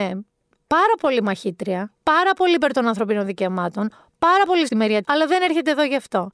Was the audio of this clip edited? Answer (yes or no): yes